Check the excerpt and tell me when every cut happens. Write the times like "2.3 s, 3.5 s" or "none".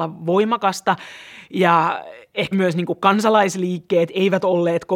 2.5 s